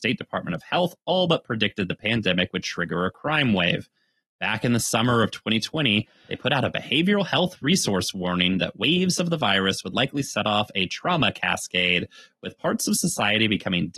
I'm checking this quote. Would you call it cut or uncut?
uncut